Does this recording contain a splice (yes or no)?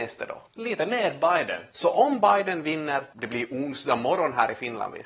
no